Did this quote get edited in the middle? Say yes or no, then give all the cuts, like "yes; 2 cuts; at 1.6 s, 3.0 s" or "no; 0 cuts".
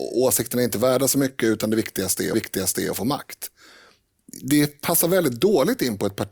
yes; 1 cut; at 2.3 s